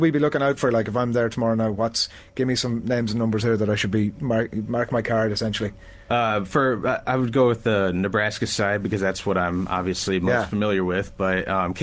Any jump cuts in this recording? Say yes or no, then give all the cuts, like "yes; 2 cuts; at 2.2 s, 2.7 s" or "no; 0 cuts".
no; 0 cuts